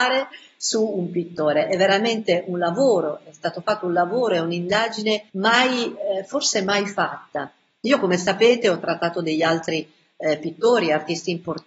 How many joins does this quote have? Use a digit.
1